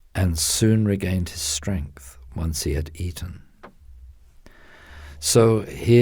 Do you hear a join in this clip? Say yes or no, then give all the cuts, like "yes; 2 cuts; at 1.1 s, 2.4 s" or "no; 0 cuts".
no; 0 cuts